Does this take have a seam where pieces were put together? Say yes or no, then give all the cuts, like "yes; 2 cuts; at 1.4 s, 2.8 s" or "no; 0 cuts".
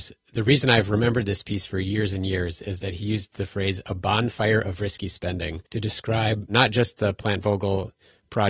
yes; 1 cut; at 5.7 s